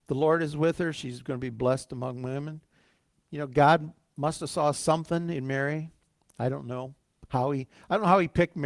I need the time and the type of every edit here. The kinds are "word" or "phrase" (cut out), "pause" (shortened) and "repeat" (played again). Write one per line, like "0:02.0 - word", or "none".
none

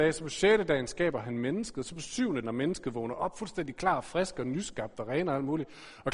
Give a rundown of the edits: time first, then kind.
0:02.4 - word

